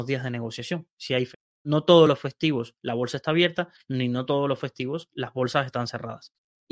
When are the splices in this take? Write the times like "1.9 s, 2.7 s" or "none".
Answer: none